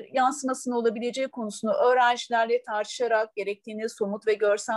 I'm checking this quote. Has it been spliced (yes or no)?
no